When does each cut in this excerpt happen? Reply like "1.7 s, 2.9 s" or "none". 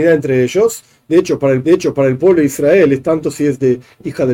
1.6 s